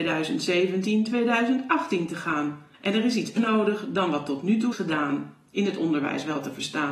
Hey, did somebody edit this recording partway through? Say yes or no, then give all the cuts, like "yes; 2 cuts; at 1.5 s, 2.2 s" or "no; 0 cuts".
yes; 3 cuts; at 2.7 s, 3.4 s, 4.7 s